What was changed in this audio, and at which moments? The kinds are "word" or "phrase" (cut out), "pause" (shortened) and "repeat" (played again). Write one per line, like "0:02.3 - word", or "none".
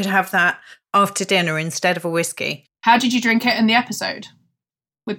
none